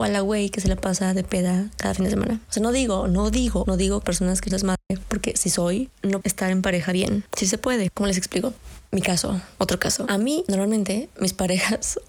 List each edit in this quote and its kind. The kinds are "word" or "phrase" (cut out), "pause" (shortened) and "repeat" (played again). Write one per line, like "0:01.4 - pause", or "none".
0:03.6 - word
0:04.0 - word
0:04.5 - word
0:06.2 - word
0:07.9 - word